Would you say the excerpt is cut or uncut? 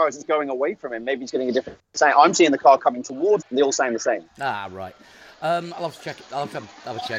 cut